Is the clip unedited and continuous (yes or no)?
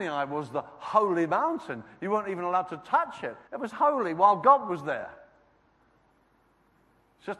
no